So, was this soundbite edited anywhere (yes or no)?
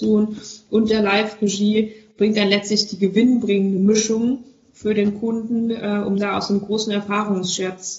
no